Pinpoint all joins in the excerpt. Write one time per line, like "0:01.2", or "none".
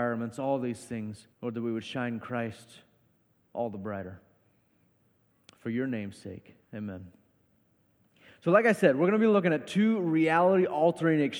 0:01.3
0:06.6